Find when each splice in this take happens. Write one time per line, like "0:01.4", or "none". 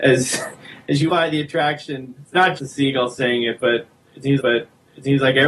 0:01.1
0:02.2
0:02.6
0:04.4